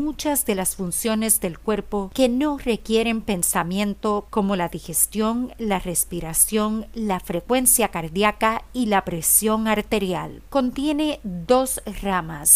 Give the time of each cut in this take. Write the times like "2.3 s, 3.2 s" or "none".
4.3 s